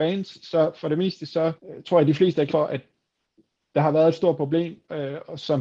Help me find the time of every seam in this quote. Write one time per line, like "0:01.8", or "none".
0:01.6
0:02.5